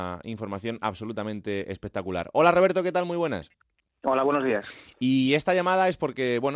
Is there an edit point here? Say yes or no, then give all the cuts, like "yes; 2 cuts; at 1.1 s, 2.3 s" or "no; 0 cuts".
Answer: no; 0 cuts